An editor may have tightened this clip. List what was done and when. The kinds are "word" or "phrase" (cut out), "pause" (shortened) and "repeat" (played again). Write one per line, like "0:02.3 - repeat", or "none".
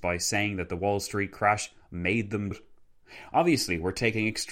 0:02.5 - word